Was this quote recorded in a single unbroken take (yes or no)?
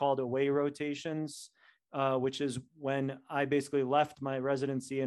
yes